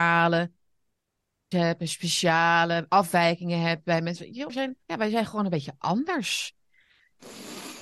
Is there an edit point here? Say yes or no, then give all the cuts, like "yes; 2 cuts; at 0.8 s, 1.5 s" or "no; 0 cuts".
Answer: yes; 3 cuts; at 1.5 s, 4.5 s, 4.8 s